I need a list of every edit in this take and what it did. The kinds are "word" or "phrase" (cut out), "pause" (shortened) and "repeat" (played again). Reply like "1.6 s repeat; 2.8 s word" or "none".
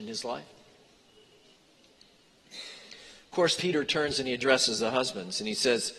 3.6 s word